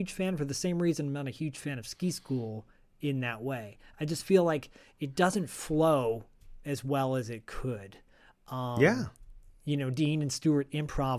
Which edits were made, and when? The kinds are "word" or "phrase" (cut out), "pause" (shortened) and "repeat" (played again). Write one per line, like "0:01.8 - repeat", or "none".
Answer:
none